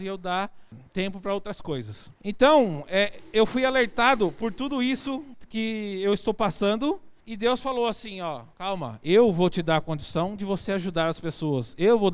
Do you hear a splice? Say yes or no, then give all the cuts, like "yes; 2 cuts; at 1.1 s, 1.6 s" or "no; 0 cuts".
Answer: yes; 3 cuts; at 2.2 s, 7.2 s, 8.5 s